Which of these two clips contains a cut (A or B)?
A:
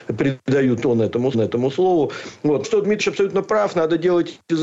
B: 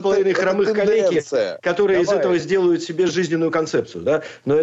A